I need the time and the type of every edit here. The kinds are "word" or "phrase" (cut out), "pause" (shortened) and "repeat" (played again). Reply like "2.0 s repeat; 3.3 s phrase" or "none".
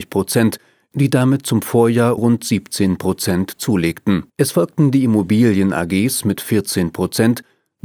2.2 s word; 4.3 s pause; 6.4 s word